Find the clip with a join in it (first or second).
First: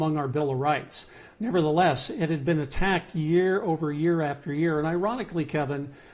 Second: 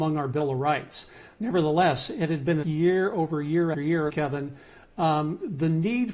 second